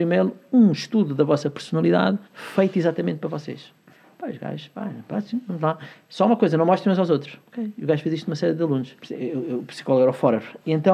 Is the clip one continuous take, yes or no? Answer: no